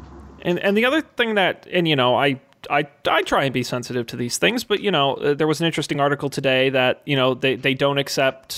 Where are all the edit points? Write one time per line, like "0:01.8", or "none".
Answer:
none